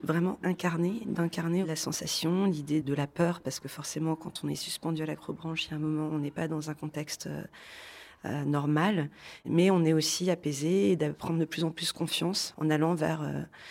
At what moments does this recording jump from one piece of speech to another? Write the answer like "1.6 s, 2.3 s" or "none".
2.8 s